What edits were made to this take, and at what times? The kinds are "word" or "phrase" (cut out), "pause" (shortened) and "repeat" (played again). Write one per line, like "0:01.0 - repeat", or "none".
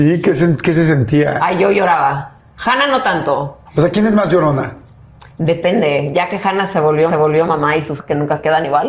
0:03.7 - pause
0:07.1 - repeat
0:08.0 - phrase